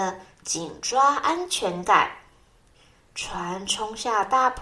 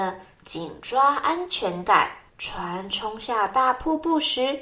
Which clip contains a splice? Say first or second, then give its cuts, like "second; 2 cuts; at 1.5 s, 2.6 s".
second; 1 cut; at 2.3 s